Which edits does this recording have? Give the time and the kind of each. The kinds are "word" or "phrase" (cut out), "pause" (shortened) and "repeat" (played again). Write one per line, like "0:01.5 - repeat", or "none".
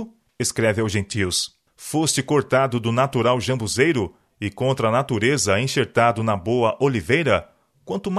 none